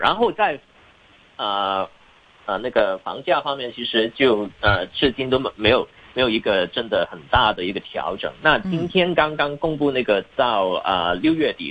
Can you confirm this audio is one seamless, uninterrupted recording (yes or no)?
no